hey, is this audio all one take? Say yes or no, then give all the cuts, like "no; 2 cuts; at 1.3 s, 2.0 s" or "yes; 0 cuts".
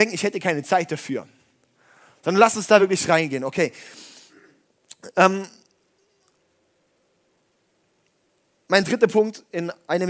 yes; 0 cuts